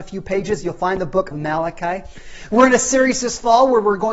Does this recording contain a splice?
yes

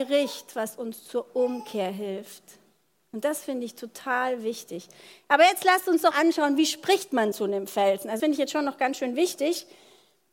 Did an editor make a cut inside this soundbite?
yes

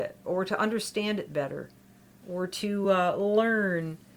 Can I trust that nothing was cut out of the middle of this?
yes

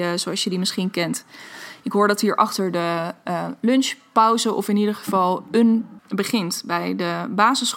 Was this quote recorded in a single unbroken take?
no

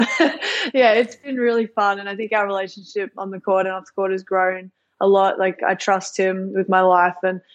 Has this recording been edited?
no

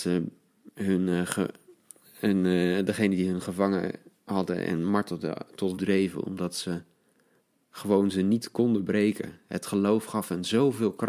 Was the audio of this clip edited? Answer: yes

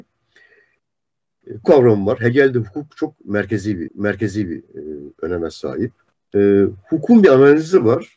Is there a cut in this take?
yes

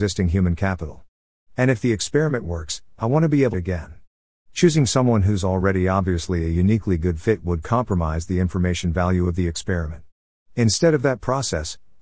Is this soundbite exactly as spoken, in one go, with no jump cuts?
no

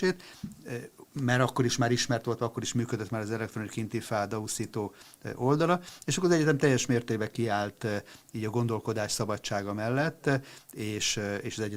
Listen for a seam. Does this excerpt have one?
no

